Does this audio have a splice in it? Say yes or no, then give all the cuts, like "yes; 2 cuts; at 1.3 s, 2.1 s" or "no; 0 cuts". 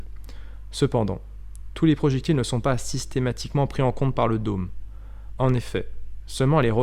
no; 0 cuts